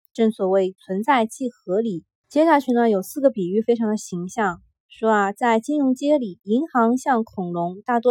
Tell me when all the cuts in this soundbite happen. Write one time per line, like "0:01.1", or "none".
none